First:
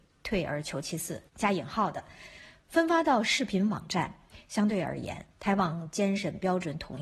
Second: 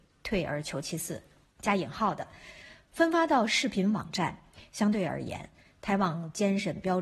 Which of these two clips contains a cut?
first; 2 cuts; at 1.3 s, 5.3 s

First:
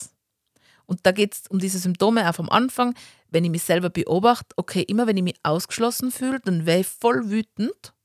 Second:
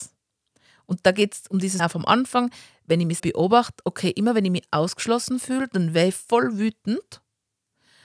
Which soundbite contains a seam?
second; 2 cuts; at 1.8 s, 3.2 s

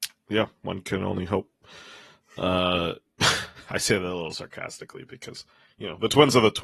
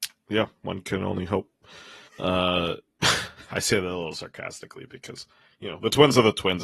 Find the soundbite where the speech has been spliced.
second; 1 cut; at 2.1 s

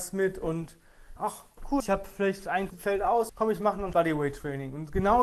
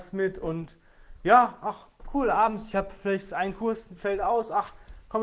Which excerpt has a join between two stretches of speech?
first; 5 cuts; at 1.2 s, 1.8 s, 2.7 s, 3.3 s, 3.9 s

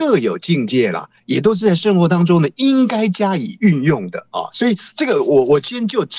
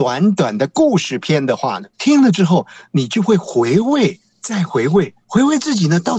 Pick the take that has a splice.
second; 2 cuts; at 1.9 s, 5.2 s

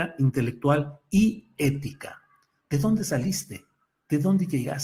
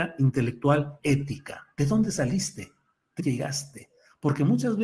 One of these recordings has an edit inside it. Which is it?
second; 3 cuts; at 1.0 s, 1.7 s, 3.2 s

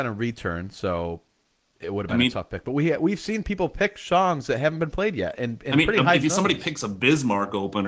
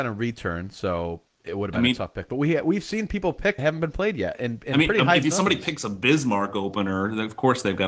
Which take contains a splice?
second; 2 cuts; at 1.3 s, 3.6 s

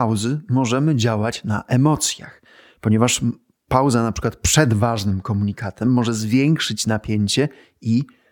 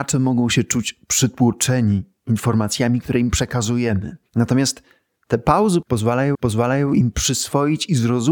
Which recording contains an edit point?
second; 2 cuts; at 4.3 s, 6.3 s

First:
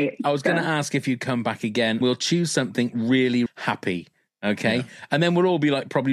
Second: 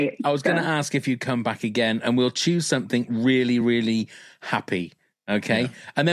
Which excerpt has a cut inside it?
first; 2 cuts; at 2.0 s, 3.5 s

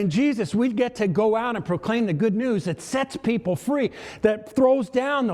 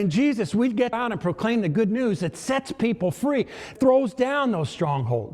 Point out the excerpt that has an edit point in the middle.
second; 2 cuts; at 0.9 s, 3.8 s

